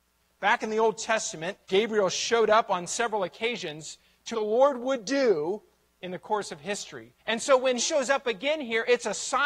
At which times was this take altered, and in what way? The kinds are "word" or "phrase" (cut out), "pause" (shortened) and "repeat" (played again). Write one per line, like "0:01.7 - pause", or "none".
0:01.6 - pause
0:04.3 - phrase
0:05.9 - pause
0:07.2 - pause
0:07.8 - word

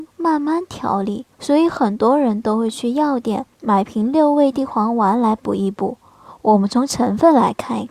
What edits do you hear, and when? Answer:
0:01.3 - pause
0:03.5 - pause

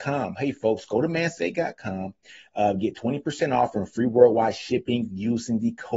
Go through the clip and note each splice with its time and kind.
none

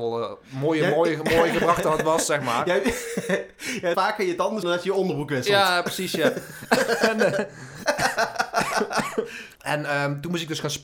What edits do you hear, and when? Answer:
0:03.9 - word
0:04.6 - word

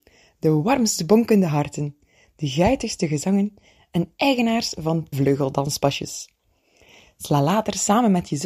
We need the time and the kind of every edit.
0:05.1 - word

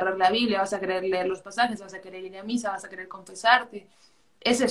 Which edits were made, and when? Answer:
none

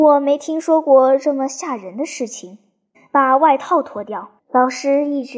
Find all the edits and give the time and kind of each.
0:02.9 - pause
0:04.4 - pause

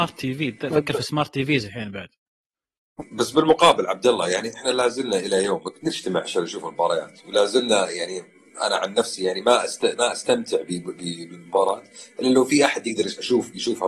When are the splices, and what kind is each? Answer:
none

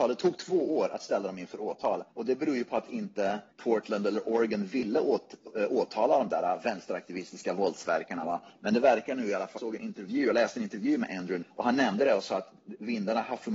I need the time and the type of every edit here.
0:02.1 - pause
0:03.5 - pause
0:09.6 - word
0:11.4 - word

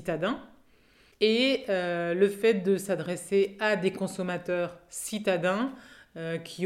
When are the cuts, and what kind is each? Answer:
none

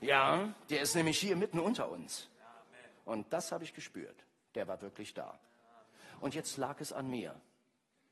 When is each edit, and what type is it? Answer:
none

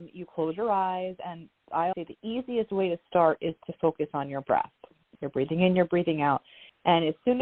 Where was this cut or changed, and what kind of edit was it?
0:01.9 - word

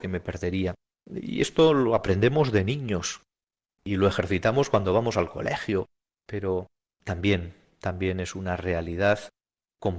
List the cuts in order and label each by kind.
none

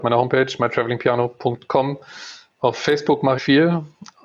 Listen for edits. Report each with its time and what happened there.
0:03.4 - phrase

